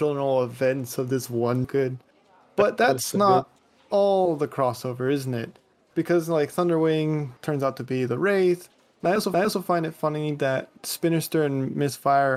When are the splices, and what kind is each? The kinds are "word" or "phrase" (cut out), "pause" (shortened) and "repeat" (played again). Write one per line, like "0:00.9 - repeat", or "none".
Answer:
0:01.6 - phrase
0:07.4 - pause
0:09.3 - repeat